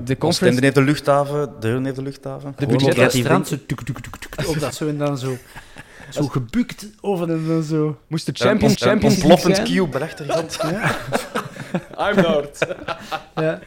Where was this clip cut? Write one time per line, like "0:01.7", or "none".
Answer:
0:02.6
0:03.8
0:04.7
0:07.3
0:08.8
0:09.9
0:12.2